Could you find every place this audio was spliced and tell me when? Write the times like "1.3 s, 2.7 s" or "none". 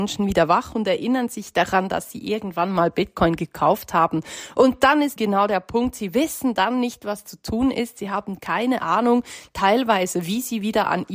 5.2 s